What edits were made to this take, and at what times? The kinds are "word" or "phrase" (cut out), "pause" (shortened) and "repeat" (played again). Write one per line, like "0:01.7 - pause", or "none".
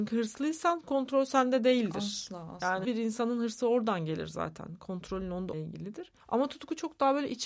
0:02.8 - word
0:05.5 - phrase